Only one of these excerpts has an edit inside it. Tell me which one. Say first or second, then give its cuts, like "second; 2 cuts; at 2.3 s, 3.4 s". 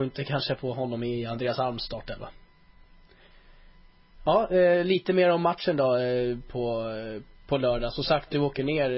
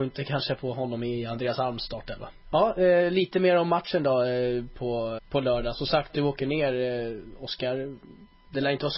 second; 2 cuts; at 2.4 s, 5.2 s